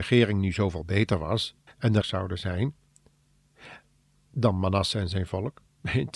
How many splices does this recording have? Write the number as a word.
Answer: two